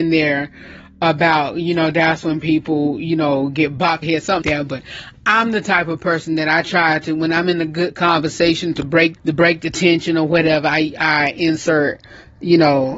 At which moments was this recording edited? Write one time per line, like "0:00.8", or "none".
0:04.0
0:04.4
0:09.2